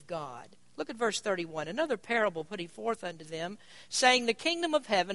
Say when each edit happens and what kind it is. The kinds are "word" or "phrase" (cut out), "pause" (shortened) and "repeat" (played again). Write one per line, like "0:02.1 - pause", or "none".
none